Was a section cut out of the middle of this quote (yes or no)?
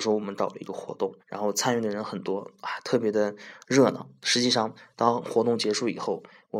yes